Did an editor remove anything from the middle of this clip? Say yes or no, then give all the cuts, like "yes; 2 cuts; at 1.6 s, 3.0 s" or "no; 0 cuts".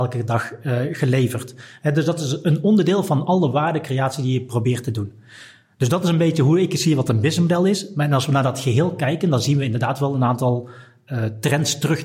no; 0 cuts